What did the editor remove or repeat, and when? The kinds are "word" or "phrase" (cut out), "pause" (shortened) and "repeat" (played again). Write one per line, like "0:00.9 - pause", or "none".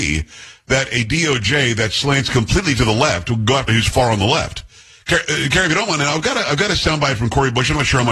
0:03.7 - word

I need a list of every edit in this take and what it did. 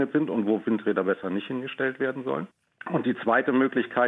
none

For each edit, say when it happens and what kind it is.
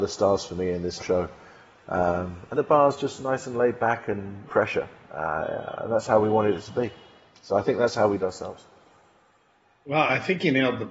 0:01.0 - word
0:02.5 - word
0:04.5 - word
0:08.2 - word

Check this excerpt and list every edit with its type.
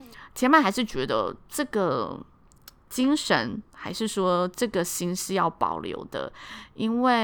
none

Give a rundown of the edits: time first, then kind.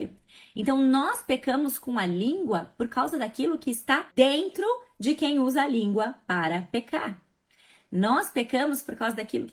0:04.1 - pause

